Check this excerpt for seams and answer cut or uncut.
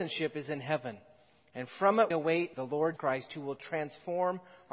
cut